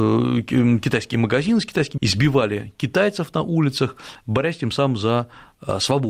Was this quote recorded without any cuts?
no; 1 cut; at 2.0 s

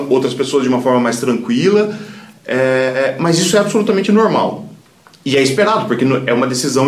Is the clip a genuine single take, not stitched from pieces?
yes; 0 cuts

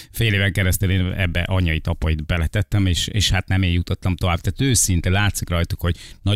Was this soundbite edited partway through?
no; 0 cuts

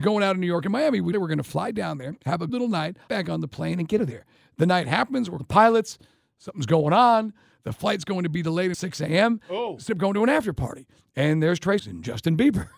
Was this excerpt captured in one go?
no; 8 cuts; at 1.1 s, 2.5 s, 3.1 s, 4.0 s, 5.4 s, 8.7 s, 9.9 s, 11.8 s

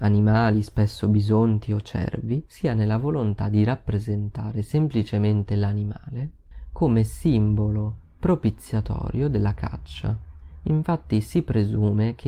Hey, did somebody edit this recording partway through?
yes; 1 cut; at 2.5 s

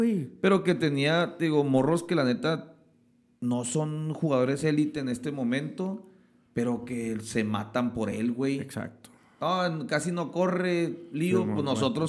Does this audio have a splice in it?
no; 0 cuts

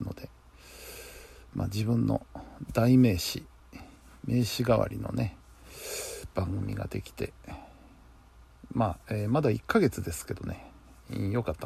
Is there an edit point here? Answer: no; 0 cuts

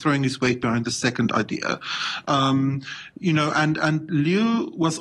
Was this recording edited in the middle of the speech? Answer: no; 0 cuts

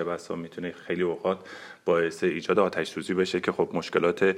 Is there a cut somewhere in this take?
no; 0 cuts

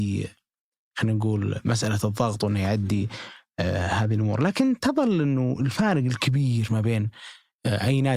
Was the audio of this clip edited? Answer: no; 0 cuts

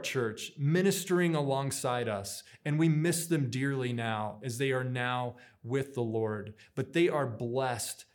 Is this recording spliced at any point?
no; 0 cuts

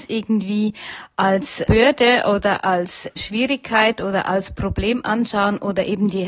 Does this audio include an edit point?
yes; 2 cuts; at 1.7 s, 3.2 s

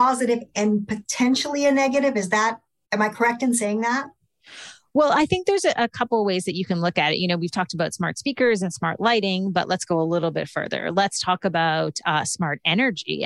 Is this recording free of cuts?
yes; 0 cuts

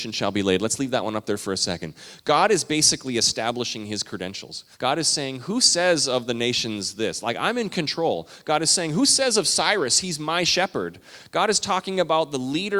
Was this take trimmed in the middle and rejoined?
yes; 1 cut; at 4.7 s

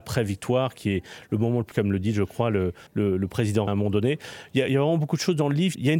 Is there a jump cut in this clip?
yes; 3 cuts; at 1.7 s, 2.9 s, 3.7 s

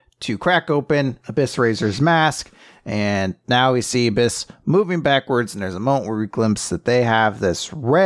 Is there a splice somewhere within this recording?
no; 0 cuts

